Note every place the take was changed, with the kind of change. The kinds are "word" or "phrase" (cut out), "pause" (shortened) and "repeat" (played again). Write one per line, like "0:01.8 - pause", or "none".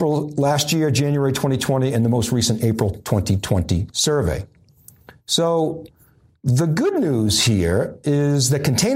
none